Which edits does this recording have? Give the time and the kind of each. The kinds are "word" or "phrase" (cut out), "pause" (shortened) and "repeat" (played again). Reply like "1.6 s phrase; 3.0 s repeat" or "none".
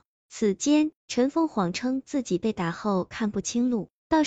1.0 s pause

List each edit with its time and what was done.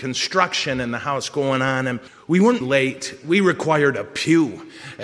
2.1 s pause; 2.6 s phrase

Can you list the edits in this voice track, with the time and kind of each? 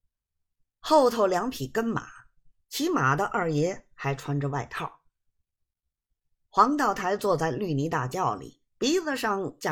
8.7 s pause

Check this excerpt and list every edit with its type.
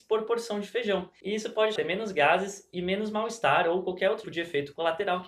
1.8 s phrase; 4.2 s word

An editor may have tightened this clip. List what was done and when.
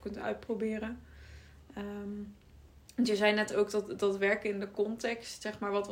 none

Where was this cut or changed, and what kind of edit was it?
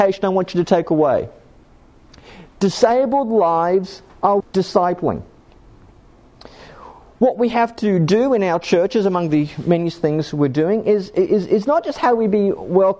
4.4 s word

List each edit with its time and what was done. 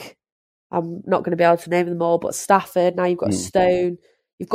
none

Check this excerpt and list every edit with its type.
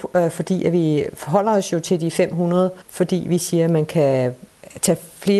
2.8 s pause

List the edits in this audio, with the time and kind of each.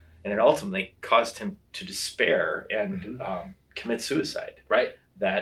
1.7 s pause

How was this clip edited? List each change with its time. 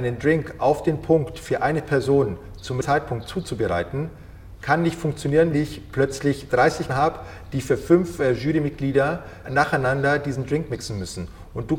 2.8 s word; 5.5 s word; 6.9 s word; 9.4 s word

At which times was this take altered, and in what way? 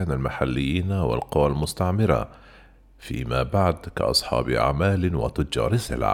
none

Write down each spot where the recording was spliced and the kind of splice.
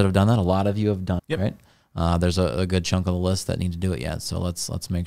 1.2 s word

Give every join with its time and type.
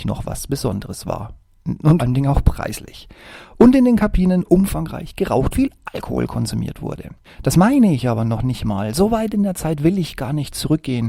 2.0 s word; 5.5 s word; 7.2 s pause

